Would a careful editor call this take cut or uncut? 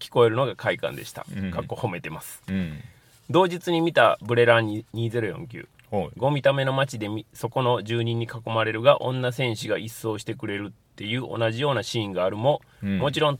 uncut